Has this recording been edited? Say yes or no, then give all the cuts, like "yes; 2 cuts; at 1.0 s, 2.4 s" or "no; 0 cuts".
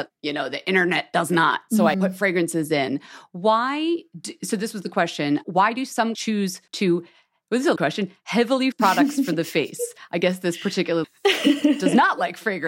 yes; 6 cuts; at 1.9 s, 6.1 s, 6.7 s, 7.8 s, 8.7 s, 11.0 s